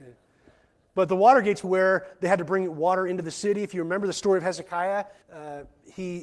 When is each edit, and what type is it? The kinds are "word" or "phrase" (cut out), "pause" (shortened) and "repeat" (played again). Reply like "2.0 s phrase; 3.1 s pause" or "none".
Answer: 1.6 s word; 5.2 s pause